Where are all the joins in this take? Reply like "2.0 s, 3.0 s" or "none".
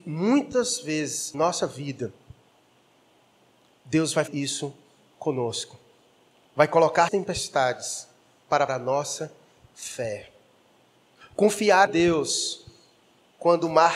1.3 s, 4.3 s, 7.1 s, 8.7 s, 11.9 s